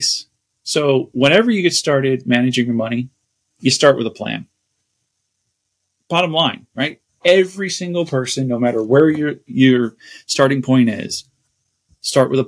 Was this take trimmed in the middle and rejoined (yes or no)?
no